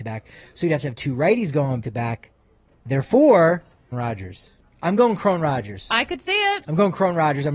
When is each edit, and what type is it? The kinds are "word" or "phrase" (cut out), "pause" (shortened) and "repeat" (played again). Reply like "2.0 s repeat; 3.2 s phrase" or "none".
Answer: 1.8 s word; 3.9 s word